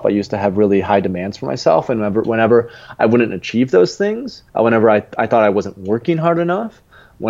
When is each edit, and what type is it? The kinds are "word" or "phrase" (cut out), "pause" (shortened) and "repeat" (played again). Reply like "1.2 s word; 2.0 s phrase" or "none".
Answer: 4.5 s pause

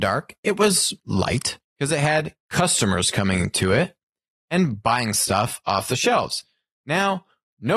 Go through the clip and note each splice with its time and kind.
1.6 s pause

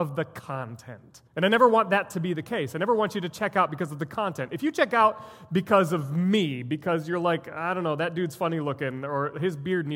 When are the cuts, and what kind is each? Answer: 1.3 s pause

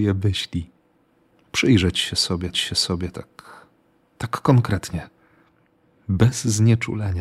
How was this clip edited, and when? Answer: 2.5 s repeat

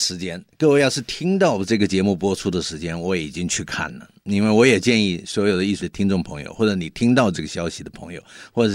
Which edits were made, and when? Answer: 5.8 s word

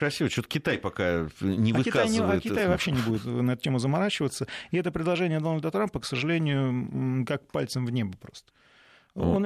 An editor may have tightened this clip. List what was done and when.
none

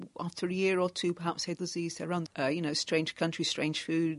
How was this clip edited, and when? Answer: 1.6 s word; 2.3 s word

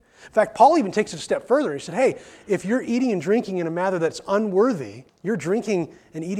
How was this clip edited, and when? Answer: 5.1 s pause

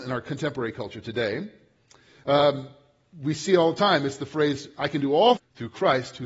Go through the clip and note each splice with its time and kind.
5.4 s word

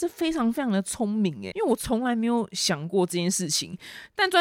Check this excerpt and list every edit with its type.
1.5 s word

